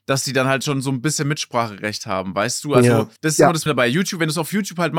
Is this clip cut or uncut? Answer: cut